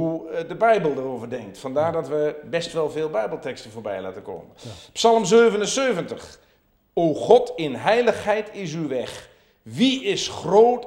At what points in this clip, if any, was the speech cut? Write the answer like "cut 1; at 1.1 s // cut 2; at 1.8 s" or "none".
none